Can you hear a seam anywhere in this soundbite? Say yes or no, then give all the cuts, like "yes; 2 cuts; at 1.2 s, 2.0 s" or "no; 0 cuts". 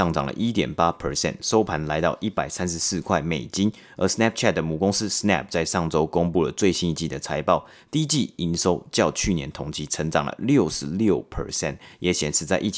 no; 0 cuts